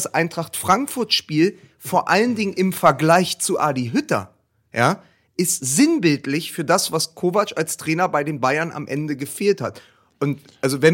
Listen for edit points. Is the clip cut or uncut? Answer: uncut